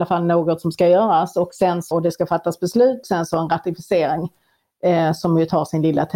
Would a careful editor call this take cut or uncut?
cut